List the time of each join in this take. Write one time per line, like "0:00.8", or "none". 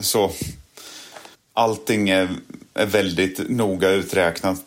0:01.3